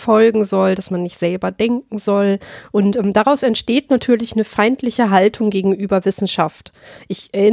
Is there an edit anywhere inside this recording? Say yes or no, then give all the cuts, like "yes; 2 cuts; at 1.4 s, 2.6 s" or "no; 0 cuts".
no; 0 cuts